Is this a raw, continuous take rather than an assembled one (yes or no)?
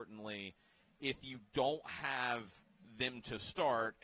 yes